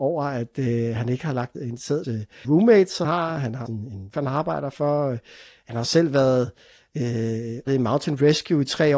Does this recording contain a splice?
yes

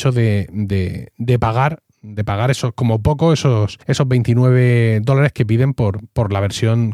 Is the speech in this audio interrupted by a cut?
yes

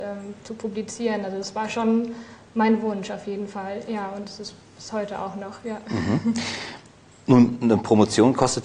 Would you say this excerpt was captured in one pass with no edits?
yes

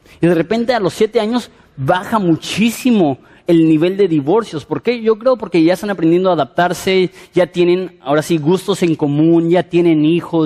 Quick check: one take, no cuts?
yes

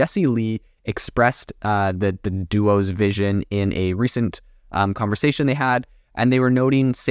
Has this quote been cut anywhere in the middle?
no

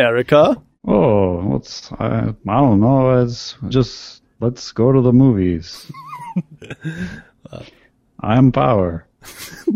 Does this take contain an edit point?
yes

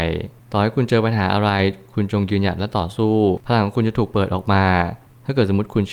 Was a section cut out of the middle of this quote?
no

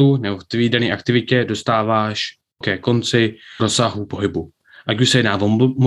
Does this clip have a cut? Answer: yes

